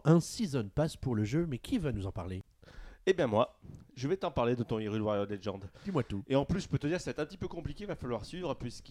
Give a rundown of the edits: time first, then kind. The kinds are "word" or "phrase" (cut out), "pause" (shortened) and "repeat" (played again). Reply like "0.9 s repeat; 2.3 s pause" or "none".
none